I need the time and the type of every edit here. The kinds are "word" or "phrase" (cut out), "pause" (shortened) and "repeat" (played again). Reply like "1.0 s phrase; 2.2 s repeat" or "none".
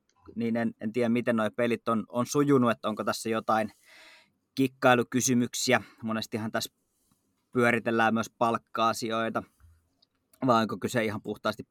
none

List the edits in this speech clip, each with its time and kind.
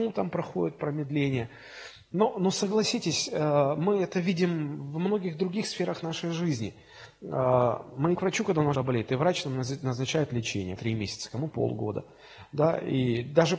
8.1 s word; 8.7 s word; 10.8 s phrase; 11.5 s word

